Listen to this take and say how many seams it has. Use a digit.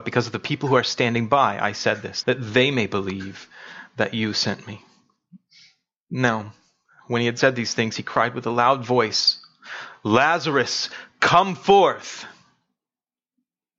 1